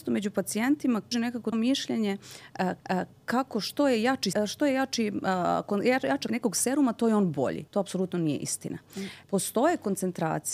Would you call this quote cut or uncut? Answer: cut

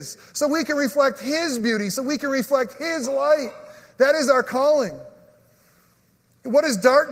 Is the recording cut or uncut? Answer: uncut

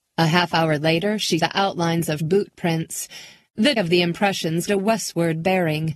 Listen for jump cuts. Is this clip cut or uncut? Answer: cut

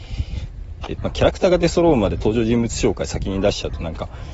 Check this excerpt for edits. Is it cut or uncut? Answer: cut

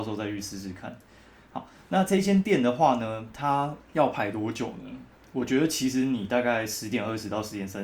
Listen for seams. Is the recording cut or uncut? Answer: cut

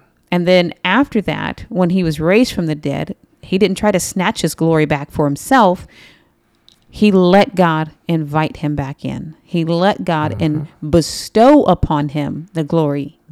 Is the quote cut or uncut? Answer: uncut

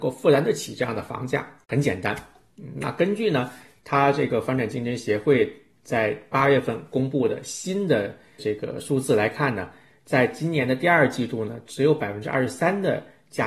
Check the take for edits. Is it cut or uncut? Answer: cut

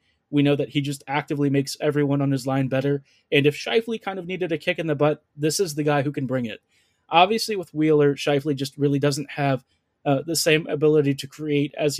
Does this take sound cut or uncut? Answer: uncut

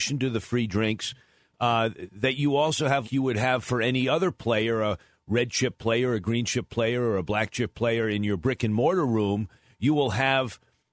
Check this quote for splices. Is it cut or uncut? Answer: cut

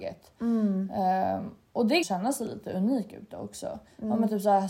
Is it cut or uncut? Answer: cut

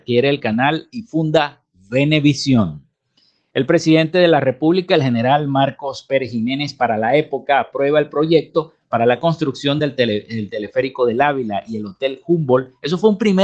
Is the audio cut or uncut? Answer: uncut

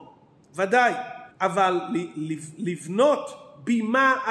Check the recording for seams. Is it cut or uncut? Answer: cut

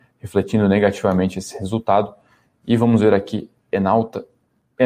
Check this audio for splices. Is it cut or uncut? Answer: uncut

